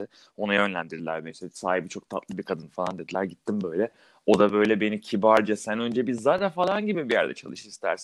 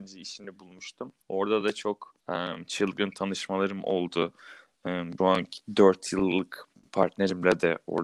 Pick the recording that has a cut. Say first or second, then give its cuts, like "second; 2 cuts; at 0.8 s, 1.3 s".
second; 3 cuts; at 1.2 s, 2.2 s, 5.2 s